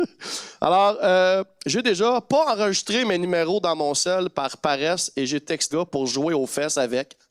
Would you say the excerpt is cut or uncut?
cut